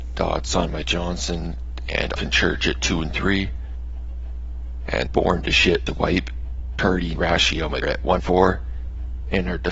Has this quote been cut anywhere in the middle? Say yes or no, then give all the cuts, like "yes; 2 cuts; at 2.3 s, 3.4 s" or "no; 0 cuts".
yes; 6 cuts; at 2.2 s, 5.1 s, 5.9 s, 7.2 s, 7.8 s, 8.2 s